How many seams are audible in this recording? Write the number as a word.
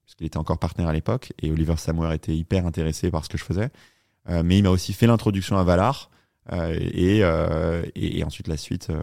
zero